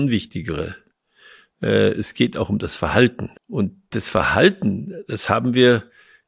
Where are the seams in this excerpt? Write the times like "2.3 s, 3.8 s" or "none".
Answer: 3.4 s

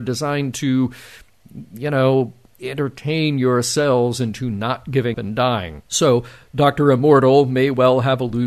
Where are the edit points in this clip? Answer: 5.1 s, 5.9 s

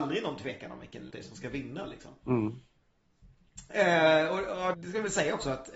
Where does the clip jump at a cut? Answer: 1.1 s, 4.7 s

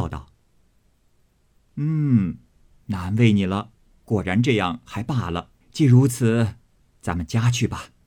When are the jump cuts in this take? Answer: 5.6 s

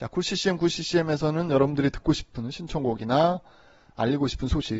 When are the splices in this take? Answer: none

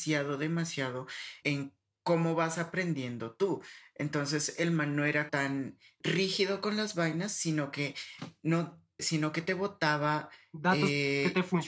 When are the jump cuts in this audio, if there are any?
1.4 s, 5.3 s, 9.0 s

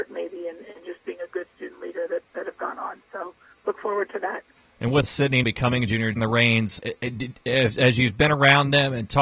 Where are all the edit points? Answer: 4.6 s, 5.0 s, 5.4 s, 6.2 s, 6.8 s

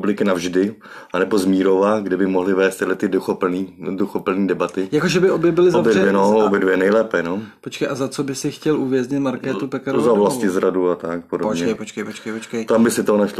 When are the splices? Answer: 11.8 s

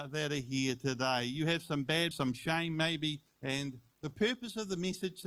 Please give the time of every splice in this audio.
2.1 s, 3.3 s

